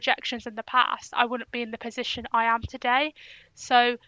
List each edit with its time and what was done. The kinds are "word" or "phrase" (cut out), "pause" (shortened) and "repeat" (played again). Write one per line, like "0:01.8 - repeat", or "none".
none